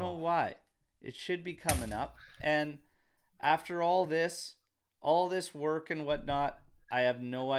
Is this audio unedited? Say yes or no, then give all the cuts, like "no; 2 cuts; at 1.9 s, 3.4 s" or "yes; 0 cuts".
yes; 0 cuts